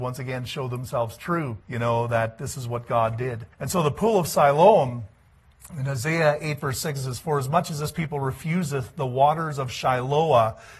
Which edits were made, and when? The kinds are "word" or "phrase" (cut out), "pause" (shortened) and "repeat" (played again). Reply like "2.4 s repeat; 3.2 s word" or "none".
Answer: 1.6 s pause; 3.5 s pause